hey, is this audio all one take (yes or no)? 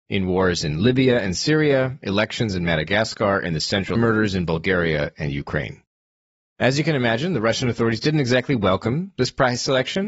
no